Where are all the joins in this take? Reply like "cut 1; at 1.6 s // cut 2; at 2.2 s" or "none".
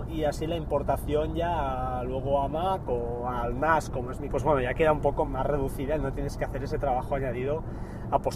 cut 1; at 4.3 s // cut 2; at 5.3 s